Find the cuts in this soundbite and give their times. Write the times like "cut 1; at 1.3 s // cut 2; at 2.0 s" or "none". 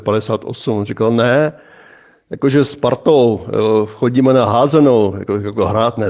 none